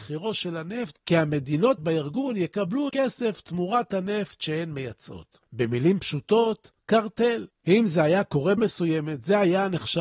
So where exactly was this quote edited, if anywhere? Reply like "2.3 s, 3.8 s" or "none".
1.0 s, 1.8 s, 2.9 s, 5.5 s, 6.8 s, 8.6 s

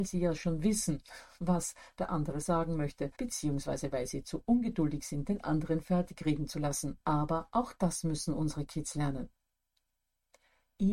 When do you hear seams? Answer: 3.1 s, 7.0 s

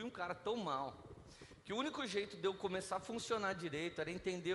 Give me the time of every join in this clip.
none

